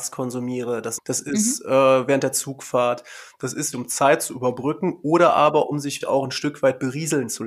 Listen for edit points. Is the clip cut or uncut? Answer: cut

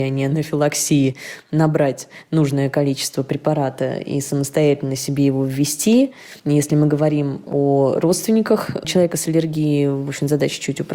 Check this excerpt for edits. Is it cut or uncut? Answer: cut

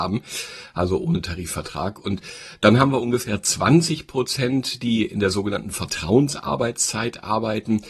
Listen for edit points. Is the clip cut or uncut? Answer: uncut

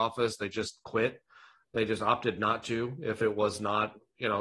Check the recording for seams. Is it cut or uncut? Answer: uncut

